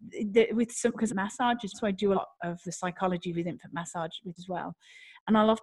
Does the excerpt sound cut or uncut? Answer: cut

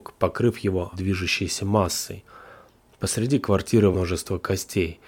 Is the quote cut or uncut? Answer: cut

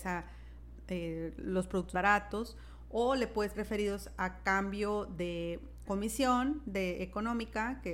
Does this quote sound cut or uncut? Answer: cut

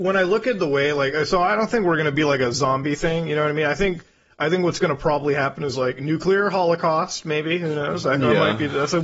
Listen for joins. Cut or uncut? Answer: uncut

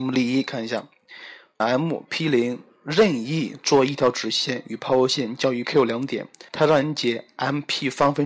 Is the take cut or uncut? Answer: cut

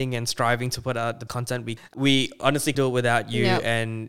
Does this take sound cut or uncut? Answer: cut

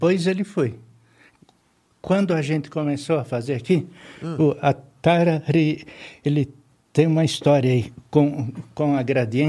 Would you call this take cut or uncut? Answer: uncut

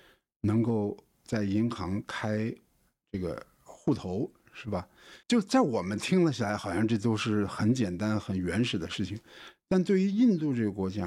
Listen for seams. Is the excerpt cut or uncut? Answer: cut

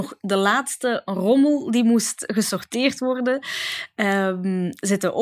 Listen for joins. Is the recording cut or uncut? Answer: uncut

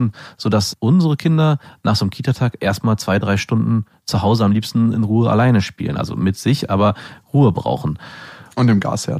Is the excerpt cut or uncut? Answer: uncut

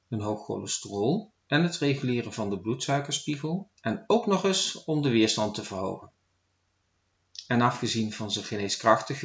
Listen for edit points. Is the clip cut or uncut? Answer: cut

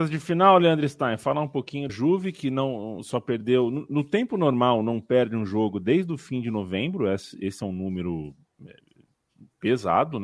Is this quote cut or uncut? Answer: cut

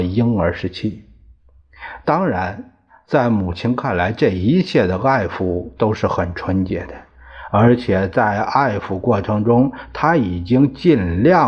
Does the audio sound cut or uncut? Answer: uncut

